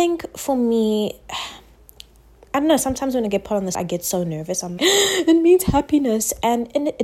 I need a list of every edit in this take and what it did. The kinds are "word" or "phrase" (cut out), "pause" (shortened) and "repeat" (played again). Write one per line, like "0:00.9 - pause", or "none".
0:03.7 - word
0:04.8 - word